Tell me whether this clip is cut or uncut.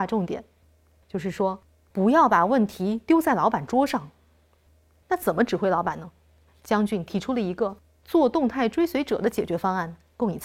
uncut